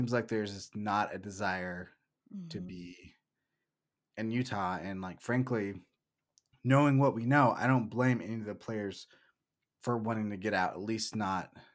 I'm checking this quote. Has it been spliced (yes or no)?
no